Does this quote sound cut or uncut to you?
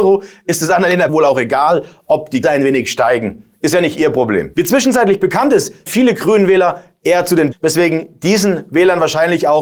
cut